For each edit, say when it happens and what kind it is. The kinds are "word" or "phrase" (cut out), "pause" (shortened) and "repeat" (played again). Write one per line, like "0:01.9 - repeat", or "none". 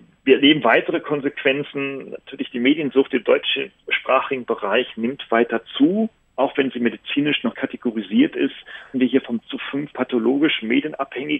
0:07.5 - word
0:08.9 - word
0:09.4 - word
0:09.9 - word